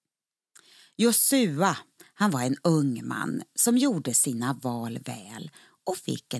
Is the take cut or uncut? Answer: uncut